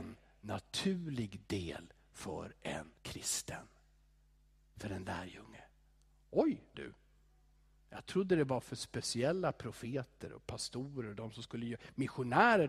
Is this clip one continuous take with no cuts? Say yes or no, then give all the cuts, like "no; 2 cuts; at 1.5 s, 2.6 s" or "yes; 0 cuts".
no; 2 cuts; at 3.0 s, 6.7 s